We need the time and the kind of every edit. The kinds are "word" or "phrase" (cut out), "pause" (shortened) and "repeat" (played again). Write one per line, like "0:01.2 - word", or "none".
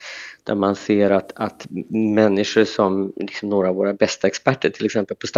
none